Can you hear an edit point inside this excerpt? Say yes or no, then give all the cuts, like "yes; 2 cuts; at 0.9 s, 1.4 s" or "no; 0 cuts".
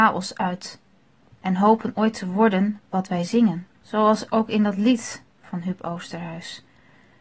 yes; 1 cut; at 3.7 s